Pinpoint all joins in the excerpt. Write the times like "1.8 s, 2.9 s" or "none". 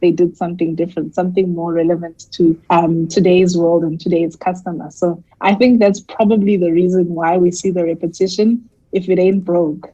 2.6 s, 5.3 s